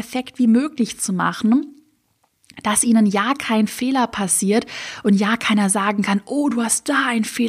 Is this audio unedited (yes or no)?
yes